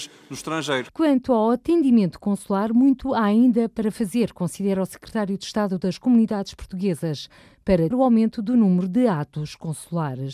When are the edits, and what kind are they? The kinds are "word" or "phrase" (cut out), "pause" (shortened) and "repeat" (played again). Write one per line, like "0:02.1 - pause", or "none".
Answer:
0:07.9 - word